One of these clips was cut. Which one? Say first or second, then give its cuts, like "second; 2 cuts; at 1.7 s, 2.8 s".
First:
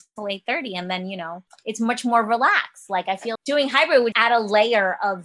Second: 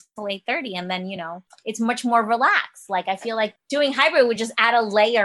first; 2 cuts; at 3.4 s, 4.1 s